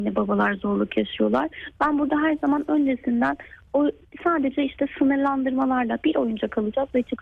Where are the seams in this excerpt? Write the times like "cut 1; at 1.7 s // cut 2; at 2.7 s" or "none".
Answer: none